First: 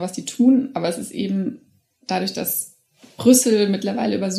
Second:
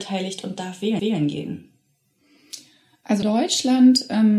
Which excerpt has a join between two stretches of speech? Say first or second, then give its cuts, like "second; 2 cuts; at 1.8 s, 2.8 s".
second; 2 cuts; at 1.0 s, 3.2 s